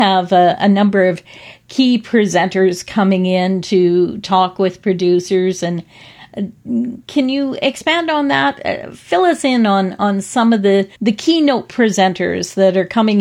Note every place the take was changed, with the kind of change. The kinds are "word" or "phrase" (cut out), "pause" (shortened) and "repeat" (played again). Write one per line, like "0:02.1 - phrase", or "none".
0:10.9 - pause